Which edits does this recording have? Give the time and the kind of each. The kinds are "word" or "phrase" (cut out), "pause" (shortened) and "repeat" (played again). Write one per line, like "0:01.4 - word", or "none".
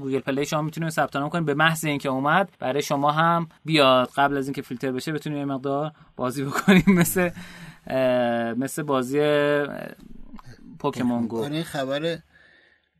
0:02.5 - pause
0:03.6 - pause